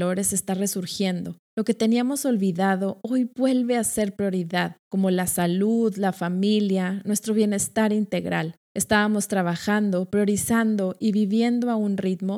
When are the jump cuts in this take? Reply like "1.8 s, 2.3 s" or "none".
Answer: 1.5 s, 4.8 s, 8.6 s

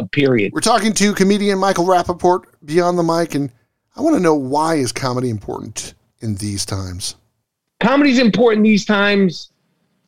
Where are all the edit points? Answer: none

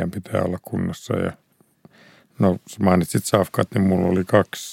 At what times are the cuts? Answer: none

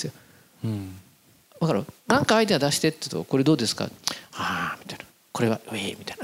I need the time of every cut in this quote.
none

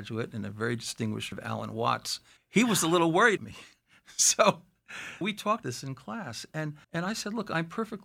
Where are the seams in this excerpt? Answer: 1.3 s, 2.4 s, 3.4 s, 5.2 s, 5.6 s, 6.8 s

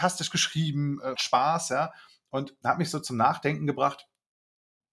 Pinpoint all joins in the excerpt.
1.1 s

